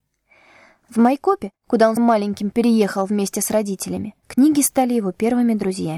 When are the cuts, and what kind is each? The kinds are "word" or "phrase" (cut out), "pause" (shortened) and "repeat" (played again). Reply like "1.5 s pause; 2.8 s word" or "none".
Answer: 1.6 s pause; 2.0 s word; 4.2 s pause